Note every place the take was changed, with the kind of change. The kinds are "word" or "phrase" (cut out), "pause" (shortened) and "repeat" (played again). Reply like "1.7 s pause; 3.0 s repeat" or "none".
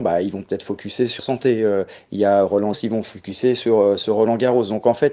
1.2 s word; 2.7 s word